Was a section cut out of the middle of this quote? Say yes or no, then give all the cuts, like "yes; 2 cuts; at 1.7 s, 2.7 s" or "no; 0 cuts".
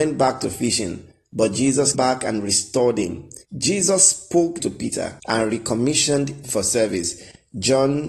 yes; 5 cuts; at 1.9 s, 3.4 s, 4.6 s, 5.2 s, 6.4 s